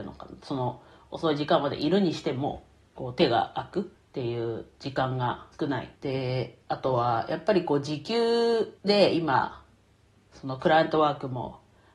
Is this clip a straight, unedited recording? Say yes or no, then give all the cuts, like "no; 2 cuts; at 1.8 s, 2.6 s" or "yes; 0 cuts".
no; 5 cuts; at 3.0 s, 3.9 s, 5.5 s, 6.0 s, 8.8 s